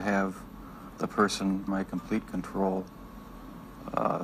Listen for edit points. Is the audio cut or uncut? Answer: cut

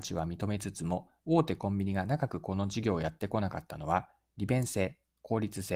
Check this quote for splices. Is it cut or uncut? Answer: uncut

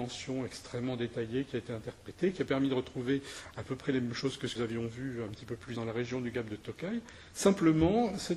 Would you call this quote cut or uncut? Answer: cut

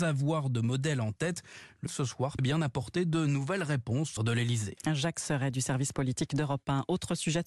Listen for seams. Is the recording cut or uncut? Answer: cut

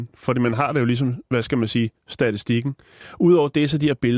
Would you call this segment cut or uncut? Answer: uncut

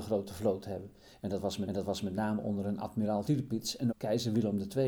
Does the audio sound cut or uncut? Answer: cut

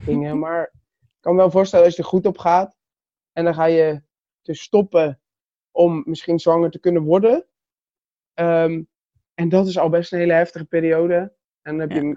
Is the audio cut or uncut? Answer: uncut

